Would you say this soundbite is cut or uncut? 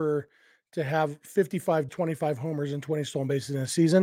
cut